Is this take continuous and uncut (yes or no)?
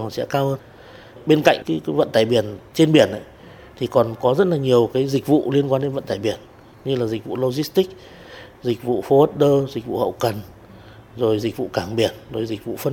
yes